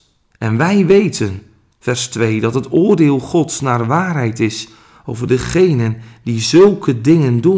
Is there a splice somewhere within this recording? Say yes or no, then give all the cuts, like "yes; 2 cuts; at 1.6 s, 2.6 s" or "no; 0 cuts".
no; 0 cuts